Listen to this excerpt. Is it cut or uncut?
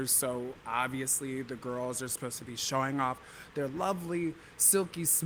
uncut